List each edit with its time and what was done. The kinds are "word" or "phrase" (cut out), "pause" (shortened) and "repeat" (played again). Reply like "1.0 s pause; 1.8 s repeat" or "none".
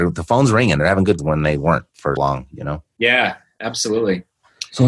1.2 s word; 2.2 s word